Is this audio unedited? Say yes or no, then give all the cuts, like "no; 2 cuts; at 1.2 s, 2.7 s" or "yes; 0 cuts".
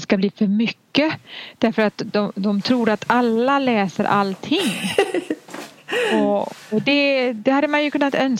yes; 0 cuts